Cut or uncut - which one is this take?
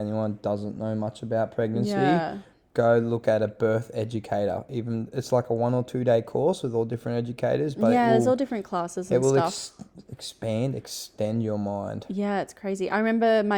uncut